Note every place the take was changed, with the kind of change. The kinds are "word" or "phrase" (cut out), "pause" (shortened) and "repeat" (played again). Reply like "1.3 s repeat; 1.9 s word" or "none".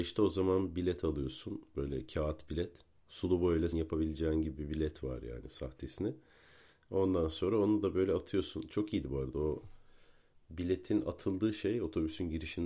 3.7 s word